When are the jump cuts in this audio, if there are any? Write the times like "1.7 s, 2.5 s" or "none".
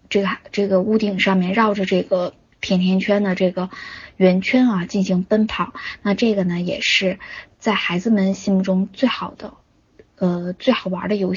none

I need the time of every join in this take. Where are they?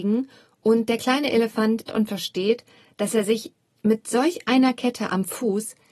1.9 s

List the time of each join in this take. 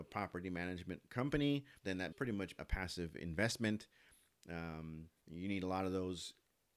1.8 s, 2.1 s, 2.6 s, 5.2 s

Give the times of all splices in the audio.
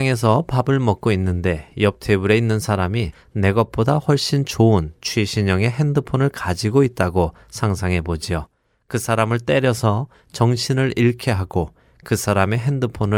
none

